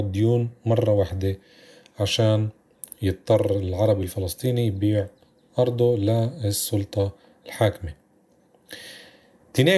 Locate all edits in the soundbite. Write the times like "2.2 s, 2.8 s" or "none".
none